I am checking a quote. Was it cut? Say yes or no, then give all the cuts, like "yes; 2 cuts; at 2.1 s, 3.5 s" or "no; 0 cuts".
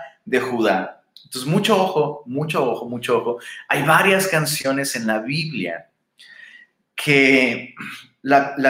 no; 0 cuts